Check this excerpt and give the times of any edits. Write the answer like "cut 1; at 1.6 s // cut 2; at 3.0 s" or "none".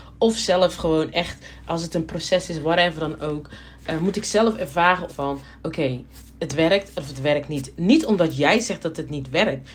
cut 1; at 5.1 s